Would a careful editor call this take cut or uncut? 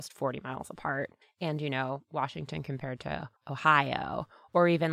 cut